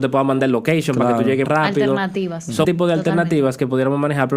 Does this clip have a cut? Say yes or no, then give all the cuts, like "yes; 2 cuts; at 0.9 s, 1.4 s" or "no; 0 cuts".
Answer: yes; 2 cuts; at 1.4 s, 2.6 s